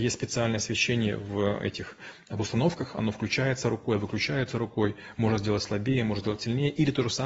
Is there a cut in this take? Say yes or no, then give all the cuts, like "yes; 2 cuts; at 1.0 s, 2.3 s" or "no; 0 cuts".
no; 0 cuts